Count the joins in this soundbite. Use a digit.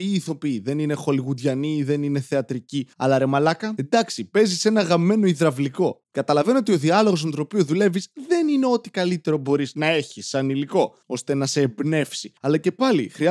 3